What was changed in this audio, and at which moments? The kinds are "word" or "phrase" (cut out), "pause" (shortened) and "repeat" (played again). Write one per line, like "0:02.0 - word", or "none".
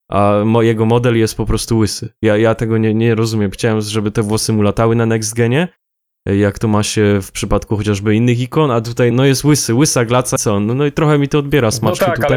0:09.1 - word
0:10.4 - word